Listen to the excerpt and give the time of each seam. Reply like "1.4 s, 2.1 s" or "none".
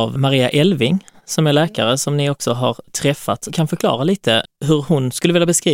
3.5 s

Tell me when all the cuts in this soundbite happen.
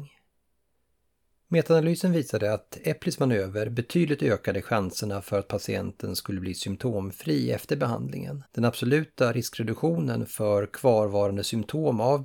8.5 s

